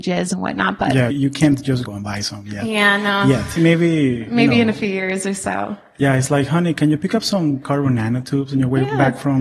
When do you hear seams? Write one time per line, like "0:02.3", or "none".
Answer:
0:01.1
0:01.8
0:03.6